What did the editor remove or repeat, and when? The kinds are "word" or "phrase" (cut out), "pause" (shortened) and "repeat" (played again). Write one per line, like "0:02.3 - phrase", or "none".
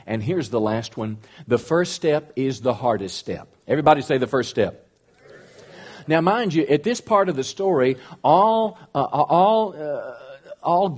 0:03.6 - pause